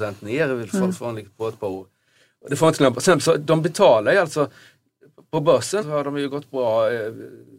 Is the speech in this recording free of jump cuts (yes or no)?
no